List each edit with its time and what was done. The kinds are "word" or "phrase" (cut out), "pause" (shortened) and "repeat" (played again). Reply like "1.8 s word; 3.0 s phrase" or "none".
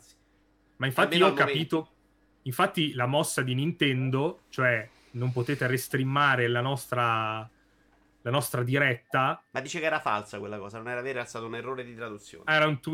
none